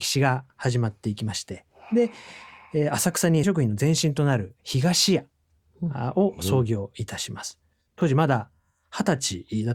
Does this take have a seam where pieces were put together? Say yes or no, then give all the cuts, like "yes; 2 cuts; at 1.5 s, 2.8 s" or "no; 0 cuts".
yes; 2 cuts; at 3.4 s, 7.9 s